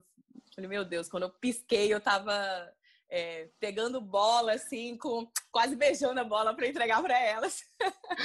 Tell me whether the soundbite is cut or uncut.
uncut